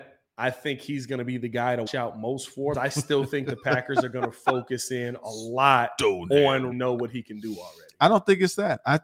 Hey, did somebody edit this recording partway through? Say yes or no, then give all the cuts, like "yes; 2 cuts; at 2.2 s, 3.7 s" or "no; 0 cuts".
yes; 3 cuts; at 1.9 s, 2.7 s, 6.7 s